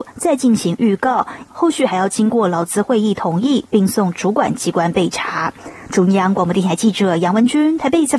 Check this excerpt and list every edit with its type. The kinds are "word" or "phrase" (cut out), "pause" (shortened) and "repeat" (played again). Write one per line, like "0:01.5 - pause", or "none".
0:01.5 - phrase

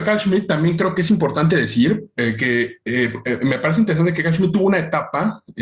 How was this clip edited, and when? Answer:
none

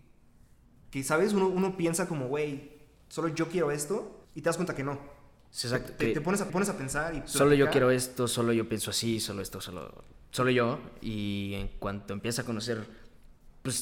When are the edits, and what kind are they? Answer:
0:04.2 - pause
0:06.5 - repeat

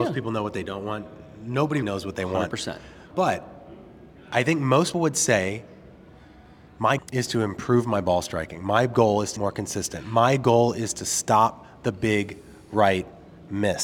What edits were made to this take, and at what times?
0:01.8 - word
0:04.9 - word
0:07.0 - word
0:09.4 - word

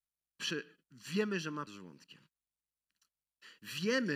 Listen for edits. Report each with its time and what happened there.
0:01.7 - word

